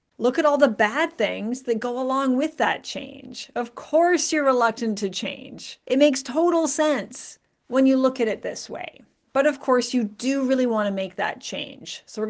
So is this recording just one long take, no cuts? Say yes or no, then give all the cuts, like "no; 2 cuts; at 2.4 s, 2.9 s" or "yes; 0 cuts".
yes; 0 cuts